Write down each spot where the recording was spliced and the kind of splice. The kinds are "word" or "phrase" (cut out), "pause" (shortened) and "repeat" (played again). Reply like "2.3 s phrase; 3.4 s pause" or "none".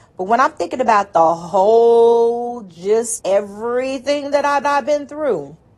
3.2 s word; 4.6 s repeat